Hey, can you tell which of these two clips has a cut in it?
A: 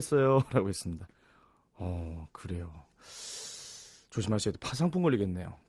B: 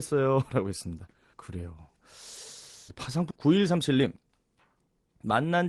B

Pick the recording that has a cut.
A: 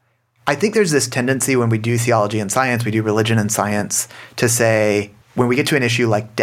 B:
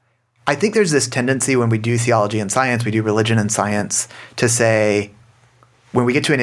A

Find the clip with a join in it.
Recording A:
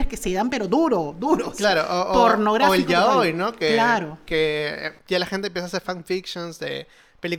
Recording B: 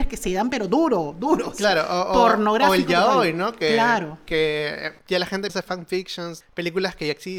B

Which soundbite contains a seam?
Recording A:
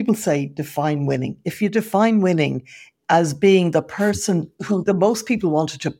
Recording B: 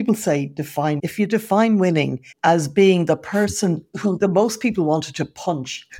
B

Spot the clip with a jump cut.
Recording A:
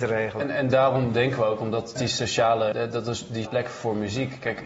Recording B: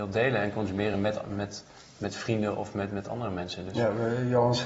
A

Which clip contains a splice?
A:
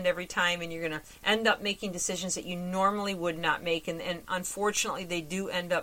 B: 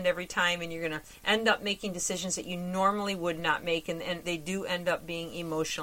B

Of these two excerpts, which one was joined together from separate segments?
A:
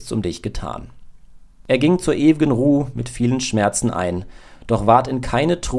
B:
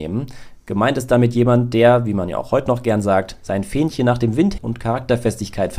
B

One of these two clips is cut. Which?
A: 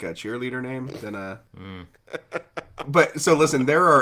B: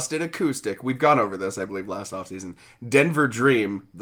A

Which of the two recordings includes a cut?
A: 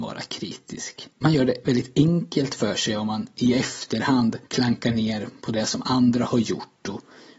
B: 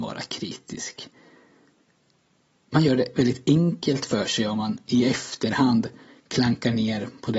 A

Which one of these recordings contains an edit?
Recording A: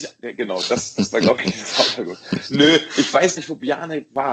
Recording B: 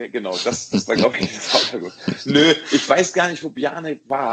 A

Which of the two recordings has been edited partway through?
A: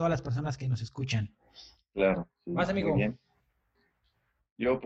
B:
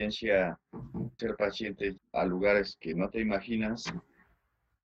B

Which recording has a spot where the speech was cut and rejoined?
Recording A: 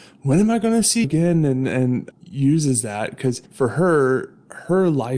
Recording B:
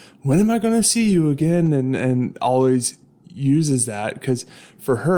A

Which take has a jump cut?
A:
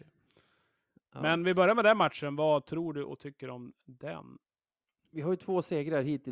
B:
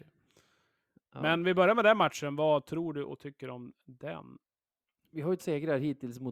B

